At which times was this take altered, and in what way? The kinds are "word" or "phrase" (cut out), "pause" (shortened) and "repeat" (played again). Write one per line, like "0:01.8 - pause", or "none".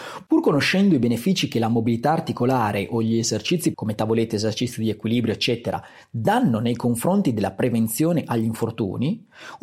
0:03.7 - word